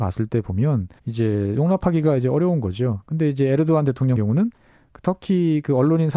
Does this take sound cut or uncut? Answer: cut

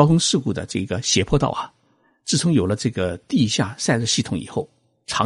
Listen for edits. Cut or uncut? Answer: uncut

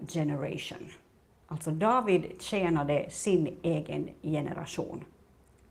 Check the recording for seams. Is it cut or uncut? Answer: uncut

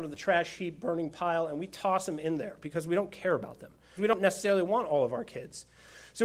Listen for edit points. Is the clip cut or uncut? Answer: cut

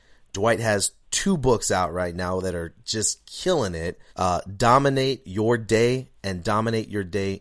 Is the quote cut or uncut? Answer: cut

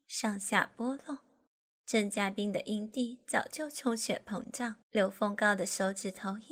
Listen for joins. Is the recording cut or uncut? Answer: cut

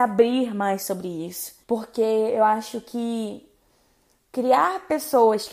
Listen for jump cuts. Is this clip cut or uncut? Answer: cut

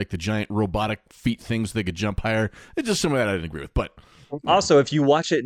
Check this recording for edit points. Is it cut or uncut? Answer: uncut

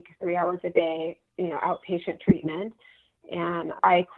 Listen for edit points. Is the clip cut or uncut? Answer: uncut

